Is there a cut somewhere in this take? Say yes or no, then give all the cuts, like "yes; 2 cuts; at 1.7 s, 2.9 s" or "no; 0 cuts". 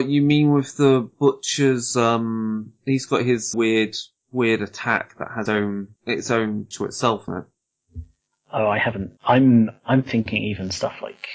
yes; 6 cuts; at 3.5 s, 5.5 s, 6.0 s, 6.7 s, 7.3 s, 9.2 s